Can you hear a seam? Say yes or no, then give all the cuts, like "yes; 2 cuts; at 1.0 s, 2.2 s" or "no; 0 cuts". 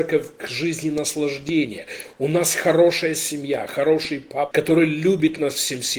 yes; 1 cut; at 4.5 s